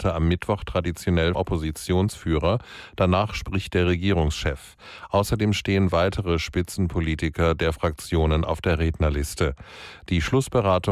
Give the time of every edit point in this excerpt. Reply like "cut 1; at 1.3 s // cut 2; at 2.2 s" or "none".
cut 1; at 1.3 s